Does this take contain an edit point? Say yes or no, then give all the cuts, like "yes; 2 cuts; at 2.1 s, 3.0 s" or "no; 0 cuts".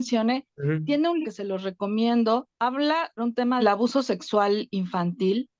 yes; 3 cuts; at 1.2 s, 3.2 s, 3.6 s